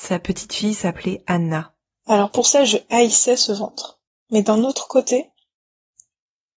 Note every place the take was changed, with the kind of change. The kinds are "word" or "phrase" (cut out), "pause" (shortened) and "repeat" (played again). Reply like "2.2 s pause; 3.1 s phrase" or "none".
4.1 s pause